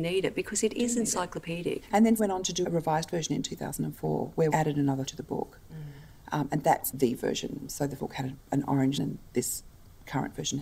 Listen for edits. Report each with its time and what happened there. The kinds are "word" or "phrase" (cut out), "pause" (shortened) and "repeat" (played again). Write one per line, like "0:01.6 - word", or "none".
0:02.2 - word
0:02.6 - word
0:04.5 - word
0:05.1 - word
0:06.9 - word
0:08.0 - word
0:09.0 - word